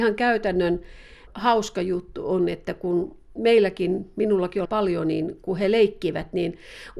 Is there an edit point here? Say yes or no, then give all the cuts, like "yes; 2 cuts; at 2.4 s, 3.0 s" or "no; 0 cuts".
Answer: yes; 2 cuts; at 1.3 s, 4.6 s